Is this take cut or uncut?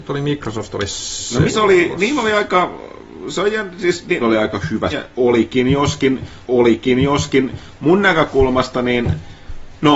cut